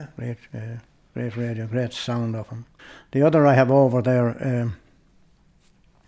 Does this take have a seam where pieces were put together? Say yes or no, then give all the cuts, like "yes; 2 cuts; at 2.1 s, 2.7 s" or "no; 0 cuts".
yes; 1 cut; at 2.8 s